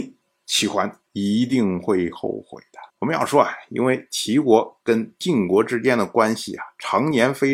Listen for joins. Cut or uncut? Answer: cut